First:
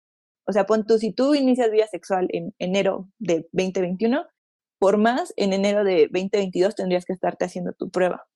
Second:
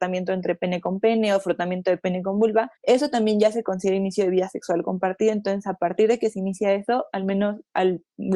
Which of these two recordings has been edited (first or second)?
second